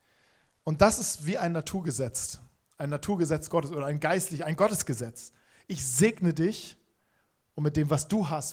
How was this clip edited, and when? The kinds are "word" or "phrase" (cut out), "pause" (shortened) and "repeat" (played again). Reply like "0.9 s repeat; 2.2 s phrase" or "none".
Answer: none